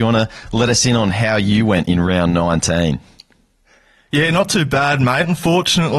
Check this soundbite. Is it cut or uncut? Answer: uncut